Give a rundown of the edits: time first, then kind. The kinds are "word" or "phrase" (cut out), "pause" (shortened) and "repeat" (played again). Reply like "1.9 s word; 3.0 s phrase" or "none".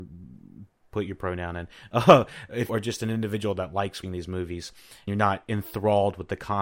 2.7 s word; 4.0 s word; 5.1 s word